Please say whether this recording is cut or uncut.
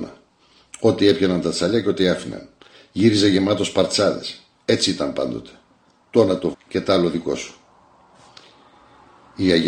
cut